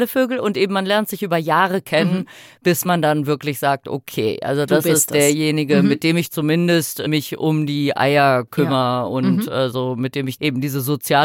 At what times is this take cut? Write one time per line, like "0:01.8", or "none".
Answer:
none